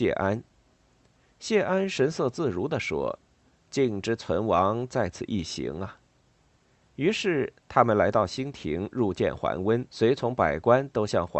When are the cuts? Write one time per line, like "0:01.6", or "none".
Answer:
0:06.1
0:09.9